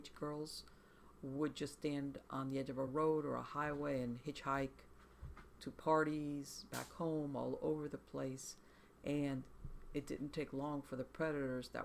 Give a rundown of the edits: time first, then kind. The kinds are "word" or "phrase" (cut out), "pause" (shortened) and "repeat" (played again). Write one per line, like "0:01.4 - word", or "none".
none